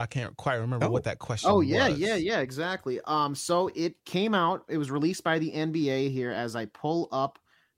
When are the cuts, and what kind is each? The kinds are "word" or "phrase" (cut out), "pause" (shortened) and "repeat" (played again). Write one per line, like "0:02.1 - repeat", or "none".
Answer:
0:04.0 - pause